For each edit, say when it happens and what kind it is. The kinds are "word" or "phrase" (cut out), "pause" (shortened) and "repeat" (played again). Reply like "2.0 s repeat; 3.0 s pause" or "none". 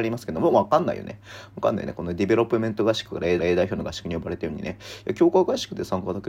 3.4 s repeat